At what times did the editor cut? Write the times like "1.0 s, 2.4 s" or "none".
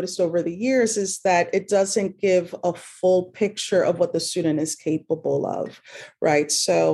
none